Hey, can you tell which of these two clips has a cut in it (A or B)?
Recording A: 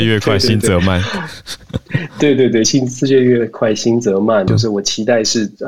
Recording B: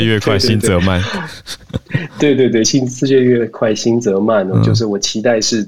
A